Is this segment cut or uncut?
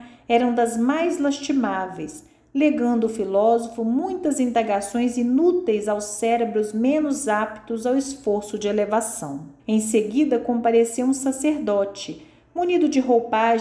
cut